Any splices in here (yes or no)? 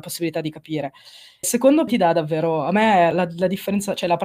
yes